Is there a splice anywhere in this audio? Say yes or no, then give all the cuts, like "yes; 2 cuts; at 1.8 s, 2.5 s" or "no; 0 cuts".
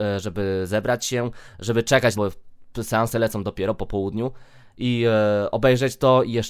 yes; 1 cut; at 2.1 s